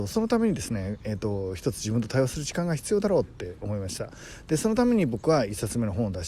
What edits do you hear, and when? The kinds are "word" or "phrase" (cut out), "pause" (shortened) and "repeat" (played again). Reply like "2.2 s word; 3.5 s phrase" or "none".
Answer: none